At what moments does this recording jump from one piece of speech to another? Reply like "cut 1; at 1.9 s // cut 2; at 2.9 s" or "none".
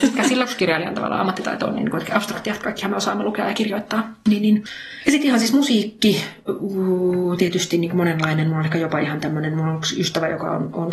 none